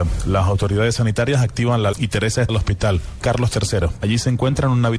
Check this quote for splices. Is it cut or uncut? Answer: cut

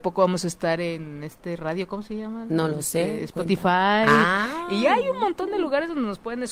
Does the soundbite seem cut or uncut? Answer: uncut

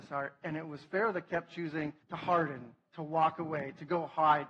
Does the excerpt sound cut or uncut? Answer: cut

